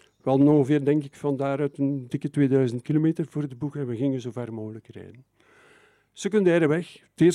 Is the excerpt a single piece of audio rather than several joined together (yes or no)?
yes